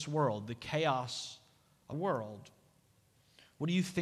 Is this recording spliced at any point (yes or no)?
yes